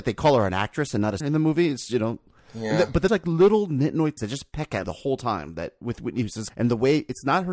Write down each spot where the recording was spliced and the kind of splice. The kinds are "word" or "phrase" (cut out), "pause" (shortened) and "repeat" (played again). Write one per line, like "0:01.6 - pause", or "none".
0:01.2 - word
0:03.1 - word
0:04.2 - word
0:04.8 - word
0:06.5 - word